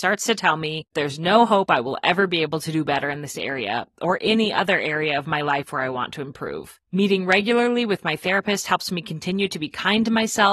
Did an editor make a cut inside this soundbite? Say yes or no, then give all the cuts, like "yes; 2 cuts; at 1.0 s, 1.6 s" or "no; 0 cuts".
yes; 2 cuts; at 0.9 s, 6.8 s